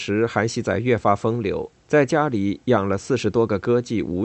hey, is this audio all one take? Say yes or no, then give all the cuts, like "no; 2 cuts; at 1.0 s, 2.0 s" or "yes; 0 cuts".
no; 1 cut; at 1.8 s